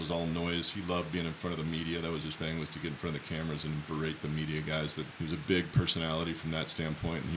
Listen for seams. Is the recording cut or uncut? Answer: cut